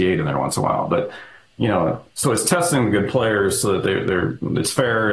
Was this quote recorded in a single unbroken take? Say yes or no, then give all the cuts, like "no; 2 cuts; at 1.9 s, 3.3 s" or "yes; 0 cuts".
yes; 0 cuts